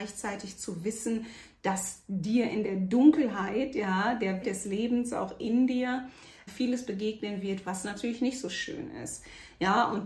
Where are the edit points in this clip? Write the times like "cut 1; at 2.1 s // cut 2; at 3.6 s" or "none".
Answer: cut 1; at 4.4 s // cut 2; at 6.5 s